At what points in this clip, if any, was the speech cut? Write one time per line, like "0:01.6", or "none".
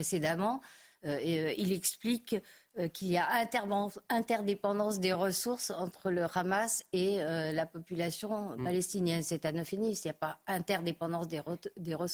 none